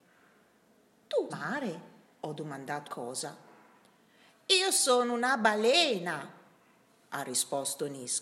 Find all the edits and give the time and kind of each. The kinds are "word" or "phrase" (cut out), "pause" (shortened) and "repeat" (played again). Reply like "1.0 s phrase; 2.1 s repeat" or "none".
1.3 s phrase; 2.0 s pause; 2.8 s word